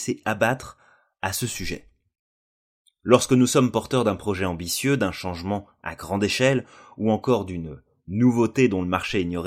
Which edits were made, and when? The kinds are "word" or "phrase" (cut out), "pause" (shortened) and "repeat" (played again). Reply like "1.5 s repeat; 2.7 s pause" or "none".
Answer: none